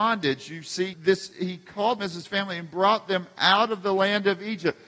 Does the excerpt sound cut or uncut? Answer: cut